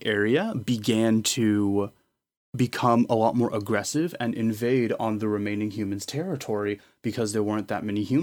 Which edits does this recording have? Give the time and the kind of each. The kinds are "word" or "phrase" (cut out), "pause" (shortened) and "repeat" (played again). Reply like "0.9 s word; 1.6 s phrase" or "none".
none